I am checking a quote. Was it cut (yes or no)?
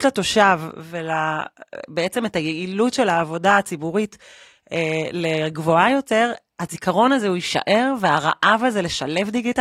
no